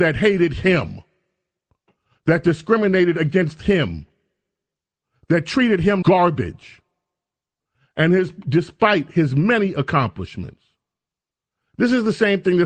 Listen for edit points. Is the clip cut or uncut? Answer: cut